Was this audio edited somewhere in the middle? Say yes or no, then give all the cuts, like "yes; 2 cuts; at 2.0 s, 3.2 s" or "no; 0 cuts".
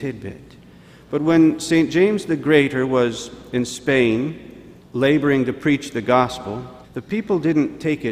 yes; 2 cuts; at 4.8 s, 6.8 s